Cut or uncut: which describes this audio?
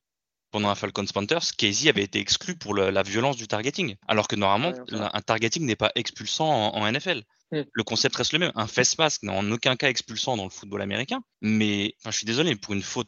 cut